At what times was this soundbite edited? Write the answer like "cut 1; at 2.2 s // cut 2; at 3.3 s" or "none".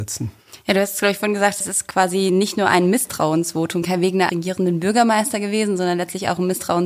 cut 1; at 3.8 s // cut 2; at 4.3 s